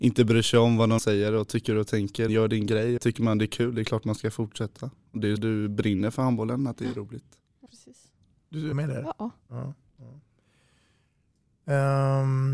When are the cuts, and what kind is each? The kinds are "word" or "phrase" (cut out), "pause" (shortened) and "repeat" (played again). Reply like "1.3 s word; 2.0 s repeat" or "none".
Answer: 1.0 s word; 2.3 s word; 3.0 s word; 5.4 s word; 7.7 s word; 8.7 s word